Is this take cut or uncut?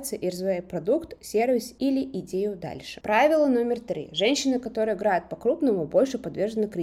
uncut